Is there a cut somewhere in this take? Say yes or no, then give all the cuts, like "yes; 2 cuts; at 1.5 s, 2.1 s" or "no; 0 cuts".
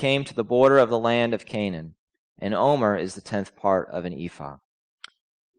no; 0 cuts